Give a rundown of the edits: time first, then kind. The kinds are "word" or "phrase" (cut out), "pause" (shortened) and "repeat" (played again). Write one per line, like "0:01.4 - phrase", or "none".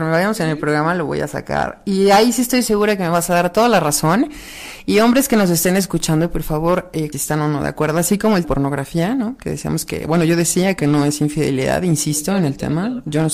0:07.1 - phrase
0:08.4 - phrase